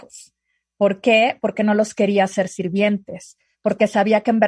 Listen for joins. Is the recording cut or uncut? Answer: uncut